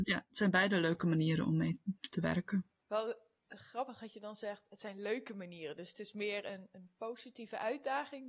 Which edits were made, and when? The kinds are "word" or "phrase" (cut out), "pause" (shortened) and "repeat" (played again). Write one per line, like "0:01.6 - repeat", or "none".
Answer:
0:02.0 - pause
0:02.8 - pause